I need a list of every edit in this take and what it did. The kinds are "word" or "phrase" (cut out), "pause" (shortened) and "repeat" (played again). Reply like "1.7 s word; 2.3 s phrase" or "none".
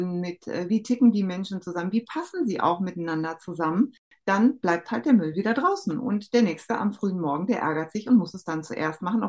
none